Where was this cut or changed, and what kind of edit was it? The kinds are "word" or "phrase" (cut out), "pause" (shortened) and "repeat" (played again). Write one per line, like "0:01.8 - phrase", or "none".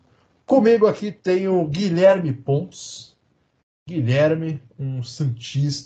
none